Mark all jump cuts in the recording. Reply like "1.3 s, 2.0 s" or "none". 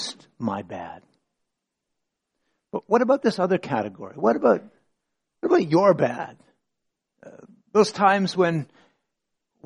none